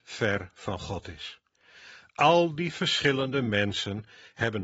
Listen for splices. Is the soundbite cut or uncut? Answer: uncut